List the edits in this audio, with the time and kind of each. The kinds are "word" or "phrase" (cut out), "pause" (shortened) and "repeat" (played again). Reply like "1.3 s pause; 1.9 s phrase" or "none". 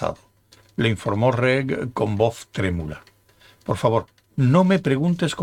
none